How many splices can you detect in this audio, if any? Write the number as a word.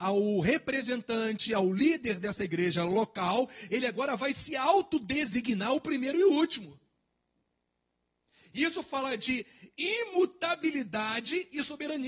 zero